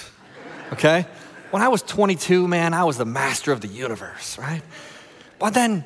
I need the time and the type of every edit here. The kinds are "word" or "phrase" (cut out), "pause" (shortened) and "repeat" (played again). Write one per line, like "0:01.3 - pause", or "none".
none